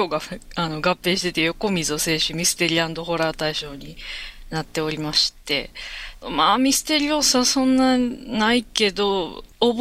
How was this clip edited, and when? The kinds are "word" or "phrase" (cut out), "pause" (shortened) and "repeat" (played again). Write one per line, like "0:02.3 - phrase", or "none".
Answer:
0:06.2 - phrase